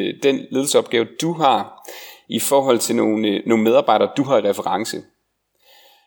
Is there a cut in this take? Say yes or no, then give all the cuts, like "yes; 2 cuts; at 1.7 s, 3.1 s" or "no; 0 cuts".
no; 0 cuts